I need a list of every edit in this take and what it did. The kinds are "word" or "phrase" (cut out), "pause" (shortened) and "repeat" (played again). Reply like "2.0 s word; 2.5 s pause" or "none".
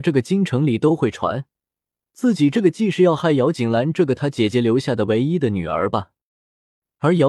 none